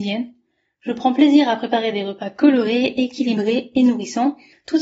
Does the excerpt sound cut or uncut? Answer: uncut